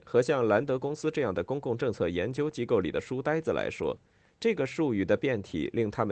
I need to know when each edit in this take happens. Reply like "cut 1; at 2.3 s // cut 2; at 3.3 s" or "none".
none